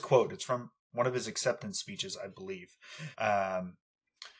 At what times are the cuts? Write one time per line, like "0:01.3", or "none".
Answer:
0:03.1

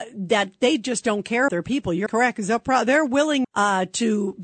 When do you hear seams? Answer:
0:01.5
0:02.1
0:03.4

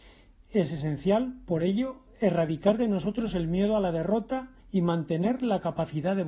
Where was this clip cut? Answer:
0:04.6

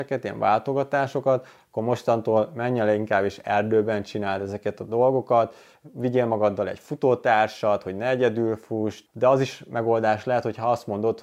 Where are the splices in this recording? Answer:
none

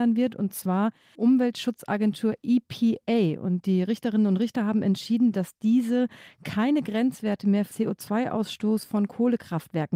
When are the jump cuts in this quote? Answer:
0:01.1
0:07.7

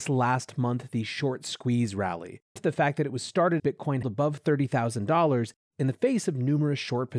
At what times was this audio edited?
0:02.6
0:03.6
0:04.0

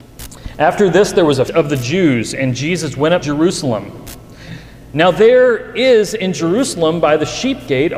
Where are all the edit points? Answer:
0:01.5
0:03.2

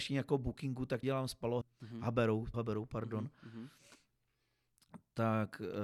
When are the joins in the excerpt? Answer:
0:01.0
0:01.6
0:02.5

